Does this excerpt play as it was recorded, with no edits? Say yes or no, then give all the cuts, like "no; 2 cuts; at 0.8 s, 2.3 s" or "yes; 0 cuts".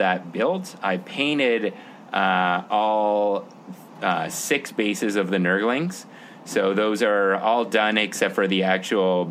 yes; 0 cuts